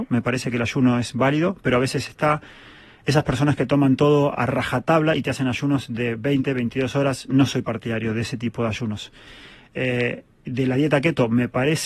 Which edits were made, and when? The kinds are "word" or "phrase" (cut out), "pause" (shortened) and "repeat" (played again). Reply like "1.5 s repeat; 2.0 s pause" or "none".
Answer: none